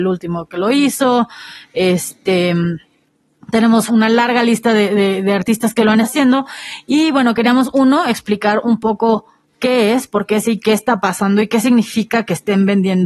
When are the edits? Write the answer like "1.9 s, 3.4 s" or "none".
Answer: 3.9 s, 6.0 s, 10.4 s